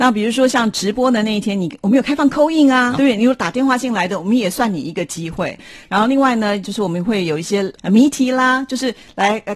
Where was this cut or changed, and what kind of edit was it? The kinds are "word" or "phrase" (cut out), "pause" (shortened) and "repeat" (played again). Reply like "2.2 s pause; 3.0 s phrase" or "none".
2.9 s word